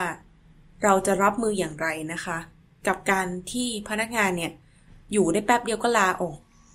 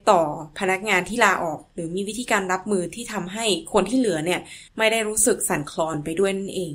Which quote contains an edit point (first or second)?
second